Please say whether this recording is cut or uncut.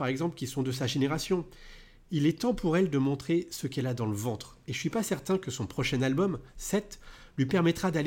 uncut